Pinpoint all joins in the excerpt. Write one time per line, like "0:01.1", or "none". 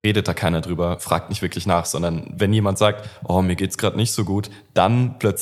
none